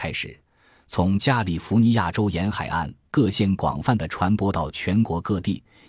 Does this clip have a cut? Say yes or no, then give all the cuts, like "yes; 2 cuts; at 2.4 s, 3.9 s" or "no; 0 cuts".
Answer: no; 0 cuts